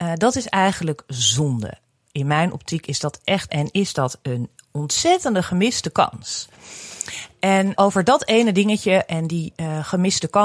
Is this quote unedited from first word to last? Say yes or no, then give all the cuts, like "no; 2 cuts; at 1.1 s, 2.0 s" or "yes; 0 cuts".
no; 2 cuts; at 3.5 s, 7.8 s